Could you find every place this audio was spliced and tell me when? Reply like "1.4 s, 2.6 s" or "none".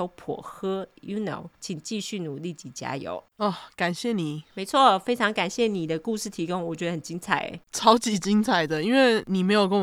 1.5 s